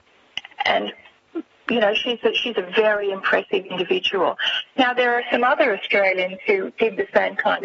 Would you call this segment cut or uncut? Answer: uncut